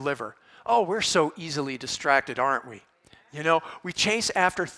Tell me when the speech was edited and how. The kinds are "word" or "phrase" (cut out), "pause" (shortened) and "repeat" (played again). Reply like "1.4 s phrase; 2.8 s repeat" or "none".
none